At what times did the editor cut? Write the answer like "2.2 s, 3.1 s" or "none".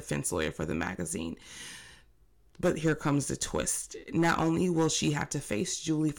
none